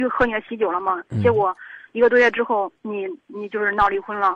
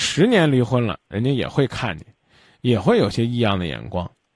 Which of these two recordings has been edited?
first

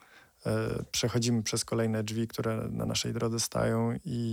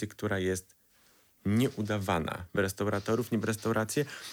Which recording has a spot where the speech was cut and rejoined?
second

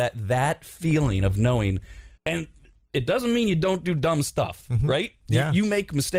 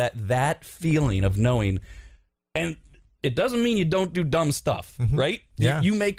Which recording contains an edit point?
first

